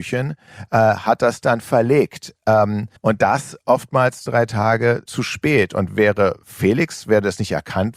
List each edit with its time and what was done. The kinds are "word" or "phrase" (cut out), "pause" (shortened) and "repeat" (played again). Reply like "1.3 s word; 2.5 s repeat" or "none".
3.0 s pause; 4.3 s word; 5.1 s word